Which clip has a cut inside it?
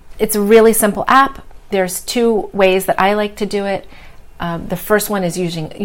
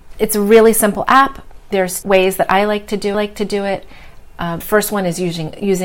second; 3 cuts; at 2.0 s, 3.1 s, 4.6 s

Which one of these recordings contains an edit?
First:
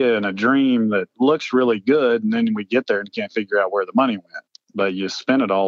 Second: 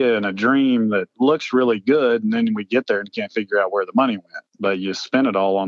second; 1 cut; at 4.5 s

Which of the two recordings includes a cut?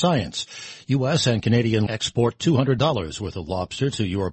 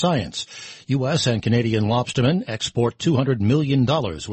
first; 2 cuts; at 1.9 s, 2.8 s

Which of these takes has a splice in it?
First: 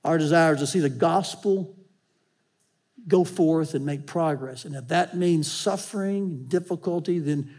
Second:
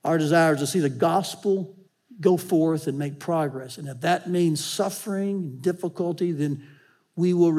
second; 1 cut; at 1.9 s

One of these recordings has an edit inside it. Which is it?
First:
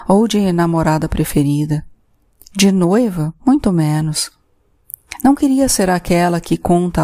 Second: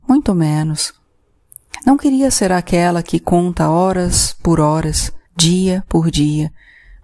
second; 1 cut; at 5.3 s

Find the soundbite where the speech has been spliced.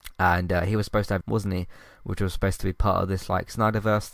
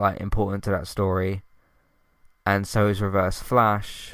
first; 1 cut; at 1.2 s

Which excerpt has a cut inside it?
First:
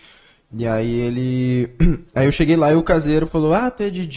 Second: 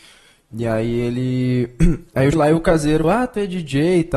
second; 2 cuts; at 2.3 s, 3.0 s

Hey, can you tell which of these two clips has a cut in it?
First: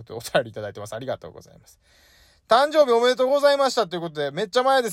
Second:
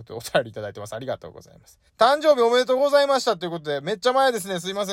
second; 1 cut; at 1.9 s

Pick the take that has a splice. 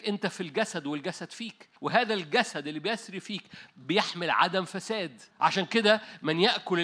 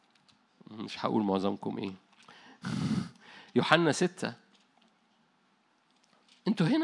first; 2 cuts; at 1.8 s, 5.3 s

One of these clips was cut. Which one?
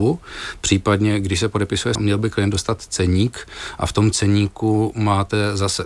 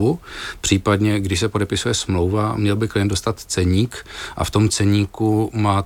first; 1 cut; at 1.9 s

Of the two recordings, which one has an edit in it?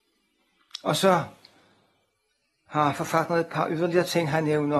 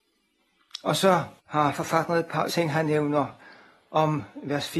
second; 2 cuts; at 1.4 s, 2.5 s

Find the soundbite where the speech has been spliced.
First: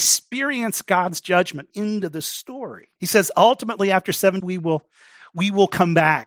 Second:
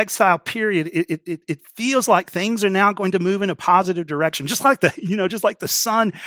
first; 3 cuts; at 1.7 s, 3.0 s, 4.4 s

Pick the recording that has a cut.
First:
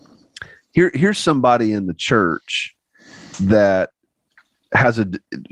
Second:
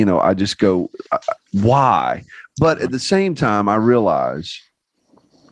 second; 1 cut; at 1.1 s

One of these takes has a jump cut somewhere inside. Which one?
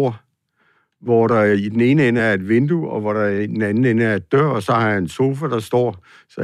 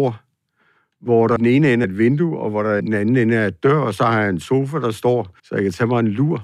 second; 4 cuts; at 1.4 s, 1.8 s, 2.8 s, 5.4 s

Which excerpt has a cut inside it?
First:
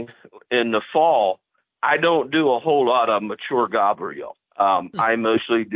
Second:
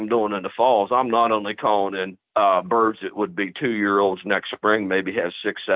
second; 1 cut; at 2.3 s

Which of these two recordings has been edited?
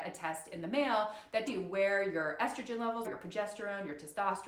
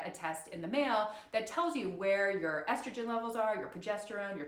first; 2 cuts; at 1.5 s, 3.0 s

